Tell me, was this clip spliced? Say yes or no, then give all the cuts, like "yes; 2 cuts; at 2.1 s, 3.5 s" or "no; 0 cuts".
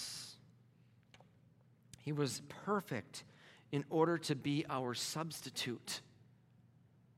no; 0 cuts